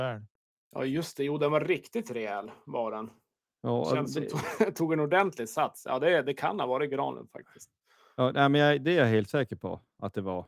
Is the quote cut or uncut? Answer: uncut